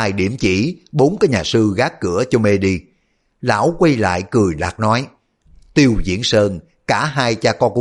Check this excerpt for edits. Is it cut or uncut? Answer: uncut